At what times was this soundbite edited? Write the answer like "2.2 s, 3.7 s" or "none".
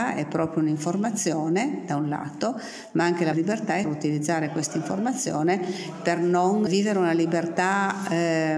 3.3 s, 3.8 s, 6.7 s